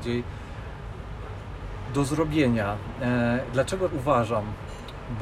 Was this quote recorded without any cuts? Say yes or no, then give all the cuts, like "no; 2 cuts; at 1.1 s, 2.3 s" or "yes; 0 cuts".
no; 1 cut; at 3.9 s